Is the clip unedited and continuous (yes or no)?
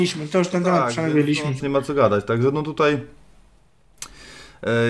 no